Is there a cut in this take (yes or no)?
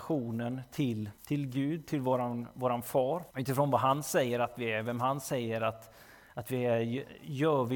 yes